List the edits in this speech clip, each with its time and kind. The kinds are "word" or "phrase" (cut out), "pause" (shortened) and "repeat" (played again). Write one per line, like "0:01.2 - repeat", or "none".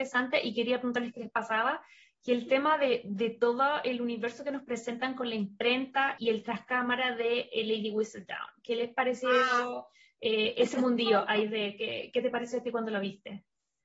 0:06.2 - word